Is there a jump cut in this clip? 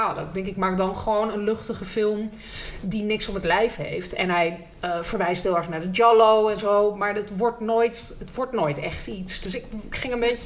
no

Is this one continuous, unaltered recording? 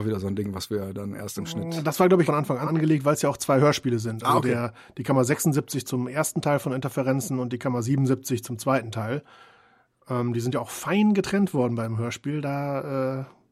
no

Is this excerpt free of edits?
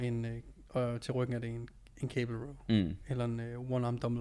yes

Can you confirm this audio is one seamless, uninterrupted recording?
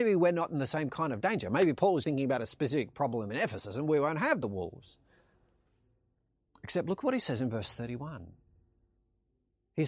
no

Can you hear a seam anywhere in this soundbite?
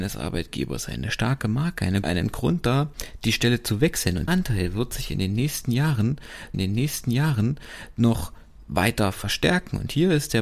yes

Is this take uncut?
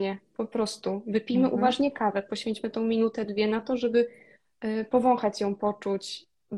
yes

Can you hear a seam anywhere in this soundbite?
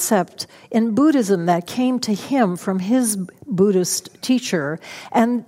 no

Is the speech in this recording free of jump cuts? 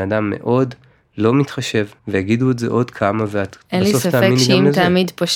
no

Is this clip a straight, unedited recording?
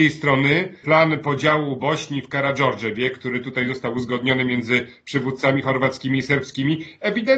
yes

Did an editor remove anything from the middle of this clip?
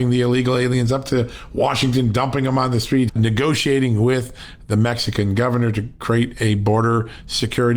yes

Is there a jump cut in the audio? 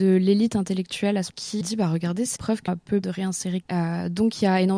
yes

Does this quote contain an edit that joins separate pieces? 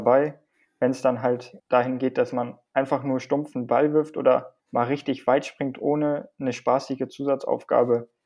yes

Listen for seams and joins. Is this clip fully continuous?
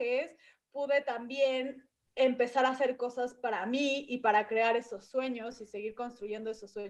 yes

